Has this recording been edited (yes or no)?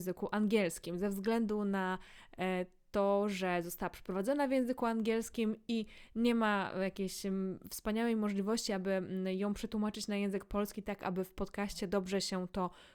no